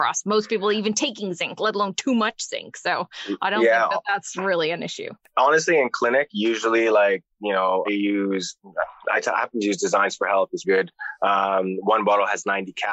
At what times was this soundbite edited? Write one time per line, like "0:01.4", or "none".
0:07.9
0:10.6